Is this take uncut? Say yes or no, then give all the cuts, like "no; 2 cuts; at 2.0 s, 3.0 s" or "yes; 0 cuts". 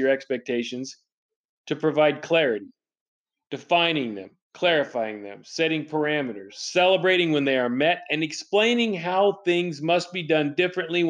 yes; 0 cuts